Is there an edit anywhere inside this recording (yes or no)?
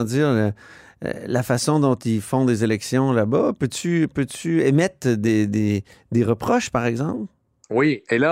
no